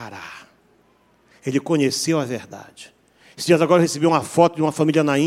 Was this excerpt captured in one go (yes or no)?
yes